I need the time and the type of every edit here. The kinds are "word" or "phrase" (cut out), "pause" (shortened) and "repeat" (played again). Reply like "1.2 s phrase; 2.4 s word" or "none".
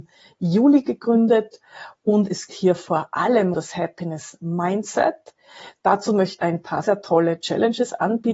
2.5 s word; 3.5 s word; 6.4 s word; 6.8 s word